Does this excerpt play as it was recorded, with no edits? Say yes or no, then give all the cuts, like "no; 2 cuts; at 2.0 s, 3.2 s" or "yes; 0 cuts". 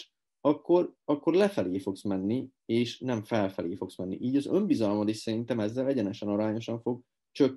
yes; 0 cuts